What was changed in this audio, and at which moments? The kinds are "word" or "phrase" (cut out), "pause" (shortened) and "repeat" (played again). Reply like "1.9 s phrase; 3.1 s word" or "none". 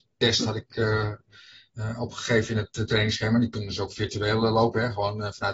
none